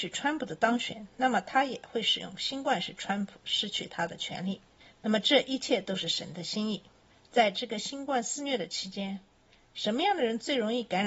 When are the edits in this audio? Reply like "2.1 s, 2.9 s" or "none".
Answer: none